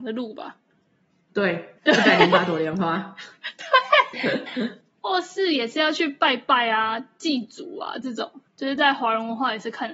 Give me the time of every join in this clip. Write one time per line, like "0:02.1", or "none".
0:01.8
0:04.1
0:04.5
0:08.5